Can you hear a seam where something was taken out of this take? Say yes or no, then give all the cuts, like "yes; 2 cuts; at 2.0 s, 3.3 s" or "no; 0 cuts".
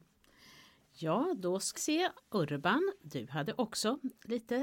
yes; 1 cut; at 1.8 s